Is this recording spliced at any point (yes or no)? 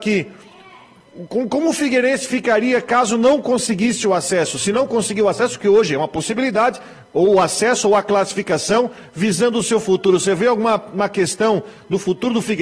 no